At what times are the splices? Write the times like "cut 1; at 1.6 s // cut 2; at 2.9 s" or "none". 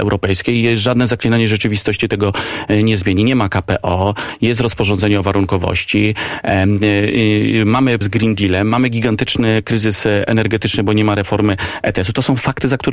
cut 1; at 8.0 s